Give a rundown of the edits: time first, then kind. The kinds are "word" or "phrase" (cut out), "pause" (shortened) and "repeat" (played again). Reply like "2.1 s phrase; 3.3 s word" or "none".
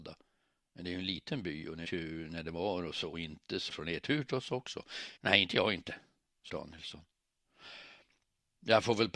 1.8 s word; 3.1 s word; 3.7 s word; 5.2 s pause; 6.5 s word